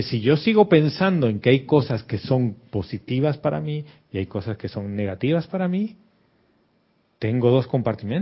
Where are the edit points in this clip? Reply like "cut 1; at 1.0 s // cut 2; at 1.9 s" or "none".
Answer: none